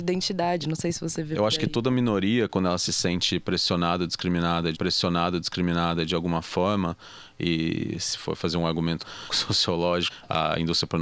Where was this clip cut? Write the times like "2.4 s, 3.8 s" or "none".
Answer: 4.7 s